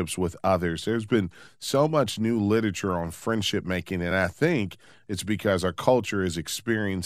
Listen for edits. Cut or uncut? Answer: uncut